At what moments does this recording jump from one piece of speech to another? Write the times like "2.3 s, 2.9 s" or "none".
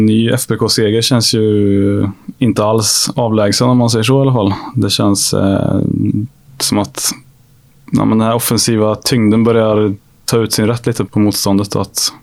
6.5 s, 11.1 s